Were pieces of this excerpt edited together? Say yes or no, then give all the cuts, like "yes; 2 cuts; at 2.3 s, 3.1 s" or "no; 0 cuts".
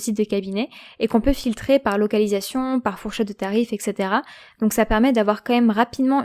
no; 0 cuts